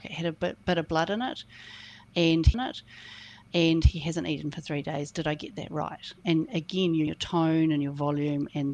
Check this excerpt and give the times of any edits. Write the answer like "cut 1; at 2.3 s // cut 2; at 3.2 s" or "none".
cut 1; at 2.5 s // cut 2; at 7.1 s